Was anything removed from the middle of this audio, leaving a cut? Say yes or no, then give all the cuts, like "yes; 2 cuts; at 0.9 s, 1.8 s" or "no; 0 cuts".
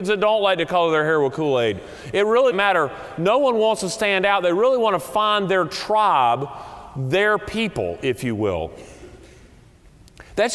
yes; 1 cut; at 2.5 s